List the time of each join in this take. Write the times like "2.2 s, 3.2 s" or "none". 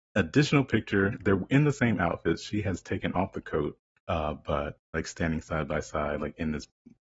3.9 s, 4.9 s